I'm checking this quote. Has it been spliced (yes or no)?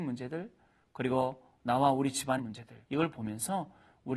yes